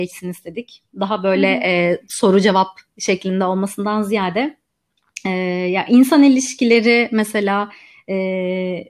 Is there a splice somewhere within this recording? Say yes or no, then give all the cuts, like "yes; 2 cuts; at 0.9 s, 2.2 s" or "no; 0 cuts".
no; 0 cuts